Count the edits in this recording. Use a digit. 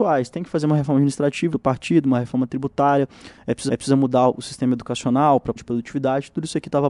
3